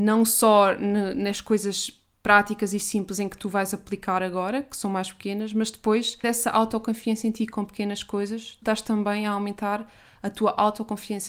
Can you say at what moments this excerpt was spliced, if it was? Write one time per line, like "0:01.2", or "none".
0:06.2
0:08.6